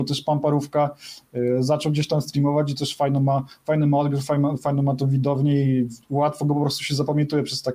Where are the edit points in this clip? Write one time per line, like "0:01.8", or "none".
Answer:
0:06.0